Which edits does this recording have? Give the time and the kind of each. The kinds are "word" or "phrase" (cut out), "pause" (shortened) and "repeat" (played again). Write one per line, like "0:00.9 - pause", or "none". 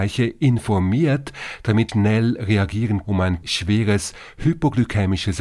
0:01.9 - word
0:03.0 - word
0:03.4 - word